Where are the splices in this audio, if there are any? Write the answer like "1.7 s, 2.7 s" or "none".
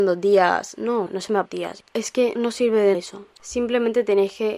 1.1 s, 1.4 s, 1.9 s, 2.4 s, 2.9 s